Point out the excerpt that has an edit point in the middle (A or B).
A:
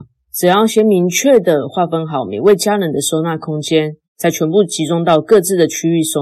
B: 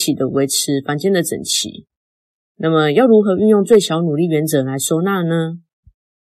A